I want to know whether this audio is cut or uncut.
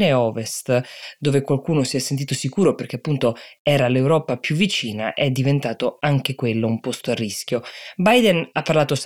uncut